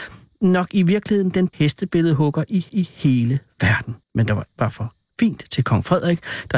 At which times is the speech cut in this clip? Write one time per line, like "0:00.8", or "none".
0:01.5
0:02.7
0:04.0
0:04.5